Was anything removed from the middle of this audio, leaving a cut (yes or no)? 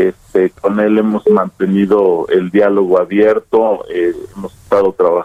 no